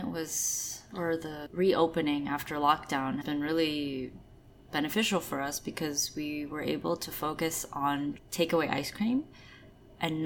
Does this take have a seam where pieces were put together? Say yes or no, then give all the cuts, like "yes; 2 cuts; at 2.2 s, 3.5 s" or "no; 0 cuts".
yes; 2 cuts; at 3.2 s, 8.2 s